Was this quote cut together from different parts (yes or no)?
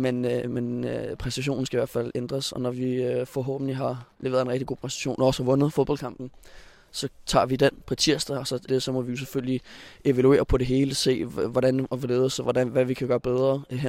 yes